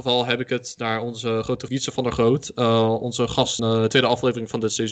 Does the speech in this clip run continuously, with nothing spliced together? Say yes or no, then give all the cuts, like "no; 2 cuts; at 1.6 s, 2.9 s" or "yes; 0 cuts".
no; 2 cuts; at 1.7 s, 3.6 s